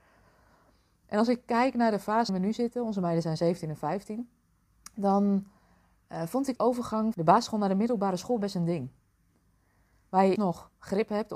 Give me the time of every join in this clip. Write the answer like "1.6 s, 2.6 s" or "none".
2.3 s, 6.6 s, 7.1 s, 10.4 s